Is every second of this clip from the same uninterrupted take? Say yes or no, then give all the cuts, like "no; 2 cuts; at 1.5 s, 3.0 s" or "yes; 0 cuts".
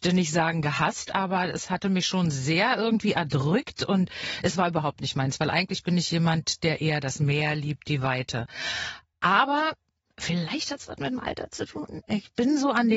yes; 0 cuts